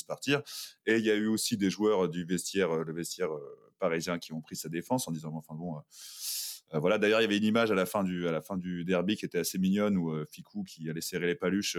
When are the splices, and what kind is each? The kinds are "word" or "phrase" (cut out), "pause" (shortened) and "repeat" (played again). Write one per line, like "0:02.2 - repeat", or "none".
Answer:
none